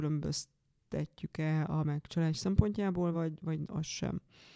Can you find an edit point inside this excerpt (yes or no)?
no